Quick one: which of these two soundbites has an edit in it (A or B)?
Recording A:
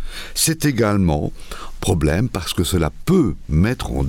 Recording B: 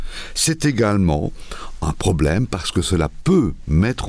A